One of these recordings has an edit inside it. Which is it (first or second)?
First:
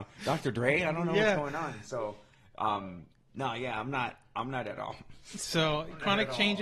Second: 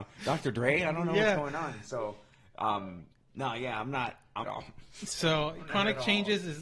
second